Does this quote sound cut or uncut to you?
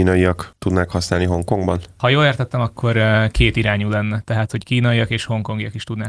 uncut